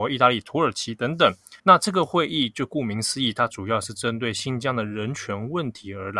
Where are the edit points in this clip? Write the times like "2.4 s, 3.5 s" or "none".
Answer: 1.6 s